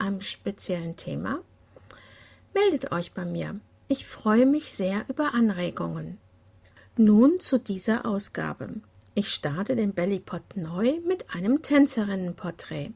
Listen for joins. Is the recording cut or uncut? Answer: uncut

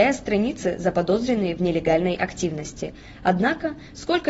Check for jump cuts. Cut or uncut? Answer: uncut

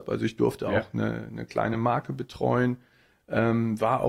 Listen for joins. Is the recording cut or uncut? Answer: uncut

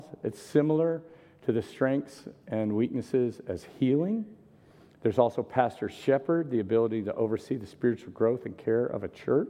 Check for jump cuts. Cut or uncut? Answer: uncut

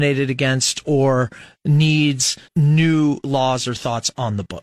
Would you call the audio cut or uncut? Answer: cut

